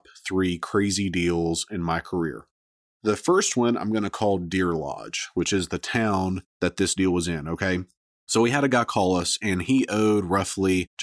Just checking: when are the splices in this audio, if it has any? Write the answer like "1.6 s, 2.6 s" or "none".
none